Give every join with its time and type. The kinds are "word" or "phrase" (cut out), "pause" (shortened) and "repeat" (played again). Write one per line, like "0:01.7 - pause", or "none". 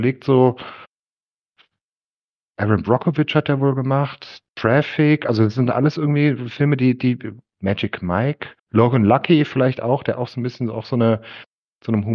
0:08.6 - pause